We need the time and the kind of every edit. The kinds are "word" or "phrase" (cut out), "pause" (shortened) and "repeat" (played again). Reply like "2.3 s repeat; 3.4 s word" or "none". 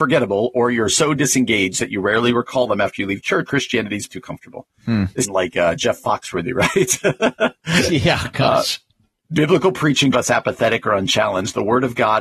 3.5 s word; 4.1 s word; 5.2 s phrase; 9.2 s pause; 10.1 s phrase

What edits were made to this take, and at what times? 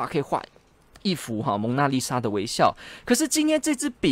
none

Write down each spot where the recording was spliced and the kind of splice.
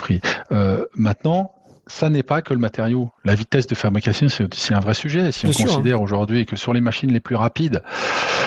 none

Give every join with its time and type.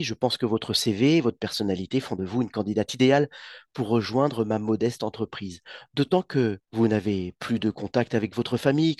6.6 s pause

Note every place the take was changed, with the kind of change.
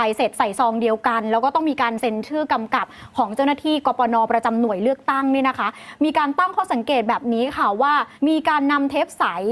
8.2 s pause

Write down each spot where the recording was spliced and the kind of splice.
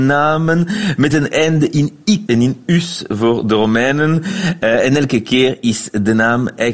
2.3 s phrase

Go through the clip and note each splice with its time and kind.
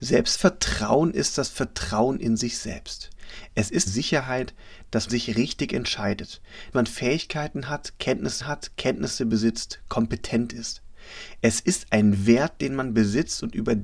3.9 s phrase; 5.1 s word; 6.7 s word; 8.4 s repeat

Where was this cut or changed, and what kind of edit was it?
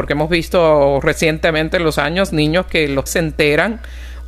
2.0 s word; 3.1 s word

